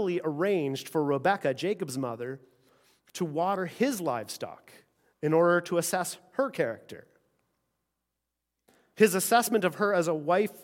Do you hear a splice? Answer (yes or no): no